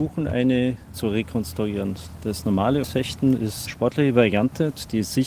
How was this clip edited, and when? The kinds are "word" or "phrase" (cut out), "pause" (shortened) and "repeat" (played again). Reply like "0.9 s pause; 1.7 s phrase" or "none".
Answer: 0.9 s word; 2.8 s word; 3.7 s word